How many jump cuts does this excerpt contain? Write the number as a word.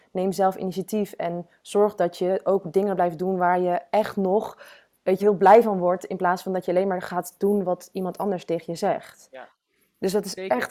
one